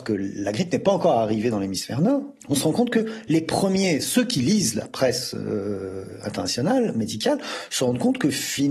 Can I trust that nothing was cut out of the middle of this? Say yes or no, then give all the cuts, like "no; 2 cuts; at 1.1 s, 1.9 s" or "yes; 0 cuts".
no; 1 cut; at 2.4 s